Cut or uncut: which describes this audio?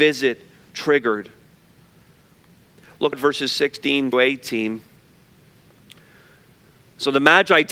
cut